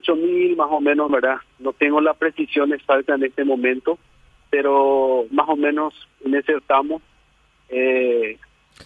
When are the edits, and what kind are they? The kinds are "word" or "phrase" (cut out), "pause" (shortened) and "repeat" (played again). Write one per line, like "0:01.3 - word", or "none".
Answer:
0:01.1 - word
0:05.3 - word
0:06.6 - word